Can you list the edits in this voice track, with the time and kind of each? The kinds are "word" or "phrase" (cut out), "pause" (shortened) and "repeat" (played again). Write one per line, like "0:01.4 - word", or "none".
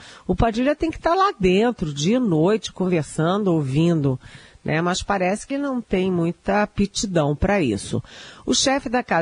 0:05.5 - word